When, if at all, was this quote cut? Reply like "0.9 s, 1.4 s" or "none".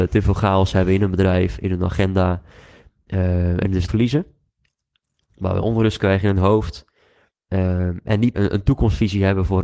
3.9 s, 5.6 s, 8.3 s